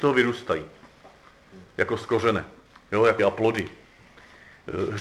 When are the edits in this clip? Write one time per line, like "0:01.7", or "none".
0:03.2